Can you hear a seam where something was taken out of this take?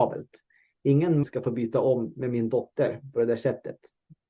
yes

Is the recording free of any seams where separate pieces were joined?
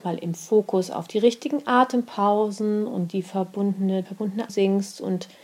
no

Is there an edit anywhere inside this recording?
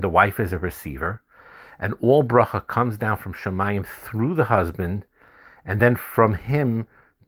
no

